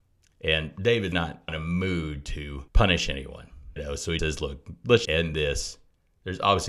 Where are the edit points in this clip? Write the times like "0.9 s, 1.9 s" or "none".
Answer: 1.1 s, 1.5 s, 2.7 s, 3.8 s, 4.2 s, 5.1 s